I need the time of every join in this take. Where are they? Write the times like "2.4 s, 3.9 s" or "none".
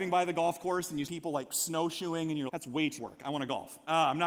1.1 s, 2.5 s, 3.0 s